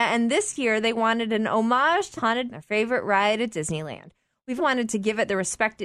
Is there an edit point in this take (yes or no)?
yes